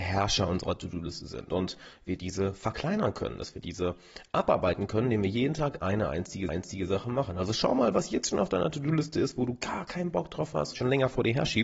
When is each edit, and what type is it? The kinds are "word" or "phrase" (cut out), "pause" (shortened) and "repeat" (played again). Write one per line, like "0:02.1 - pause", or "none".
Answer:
0:06.5 - repeat
0:10.7 - phrase